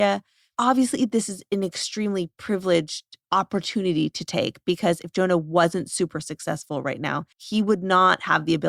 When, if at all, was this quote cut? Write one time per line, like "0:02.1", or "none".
0:07.3